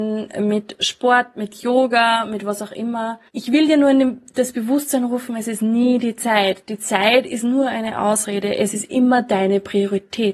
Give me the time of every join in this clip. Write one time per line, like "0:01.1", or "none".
0:03.3